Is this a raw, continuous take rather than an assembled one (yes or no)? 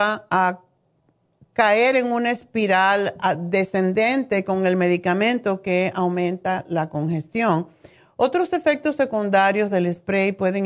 yes